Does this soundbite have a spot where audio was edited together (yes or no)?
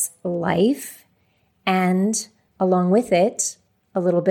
yes